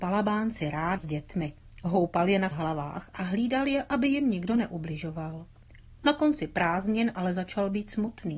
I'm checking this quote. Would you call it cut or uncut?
cut